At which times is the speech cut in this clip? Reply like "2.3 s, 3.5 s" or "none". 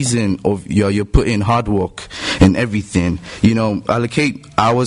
none